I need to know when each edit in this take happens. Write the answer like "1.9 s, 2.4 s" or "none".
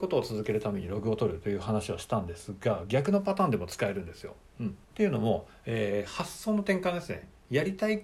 4.8 s